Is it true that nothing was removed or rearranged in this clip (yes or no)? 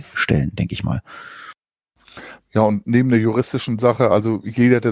yes